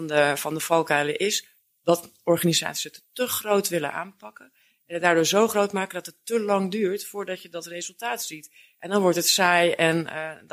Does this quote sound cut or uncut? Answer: uncut